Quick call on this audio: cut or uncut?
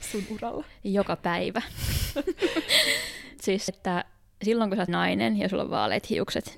cut